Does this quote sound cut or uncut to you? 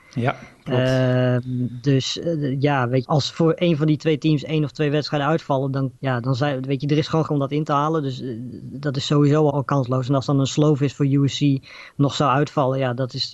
cut